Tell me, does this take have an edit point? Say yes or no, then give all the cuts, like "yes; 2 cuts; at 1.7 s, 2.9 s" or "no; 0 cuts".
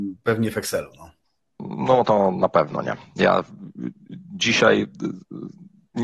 no; 0 cuts